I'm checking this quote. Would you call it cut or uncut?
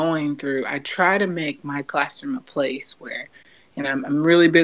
uncut